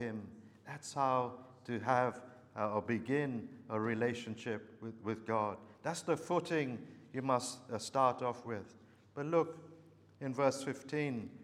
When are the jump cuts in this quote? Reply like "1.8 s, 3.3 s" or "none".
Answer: none